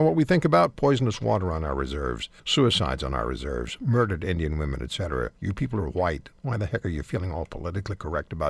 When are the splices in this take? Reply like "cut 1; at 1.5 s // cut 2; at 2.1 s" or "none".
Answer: cut 1; at 2.4 s // cut 2; at 5.4 s